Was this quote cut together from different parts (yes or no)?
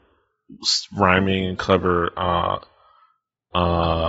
no